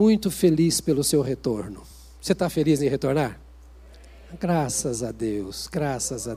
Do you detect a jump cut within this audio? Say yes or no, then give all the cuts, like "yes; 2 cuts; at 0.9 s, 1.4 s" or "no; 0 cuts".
no; 0 cuts